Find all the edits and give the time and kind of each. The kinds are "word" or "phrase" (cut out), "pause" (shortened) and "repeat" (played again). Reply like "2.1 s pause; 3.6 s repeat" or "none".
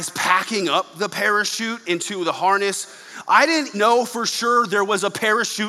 3.7 s word